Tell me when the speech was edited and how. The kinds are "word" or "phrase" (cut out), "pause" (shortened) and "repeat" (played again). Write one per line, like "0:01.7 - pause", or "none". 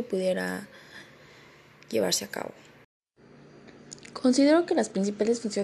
none